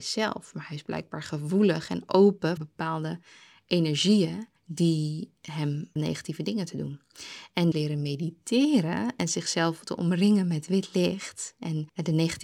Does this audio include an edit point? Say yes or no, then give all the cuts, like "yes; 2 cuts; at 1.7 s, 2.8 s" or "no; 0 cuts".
yes; 4 cuts; at 2.6 s, 4.6 s, 6.0 s, 7.7 s